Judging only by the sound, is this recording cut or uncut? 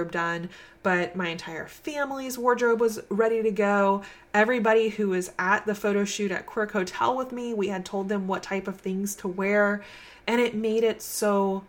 uncut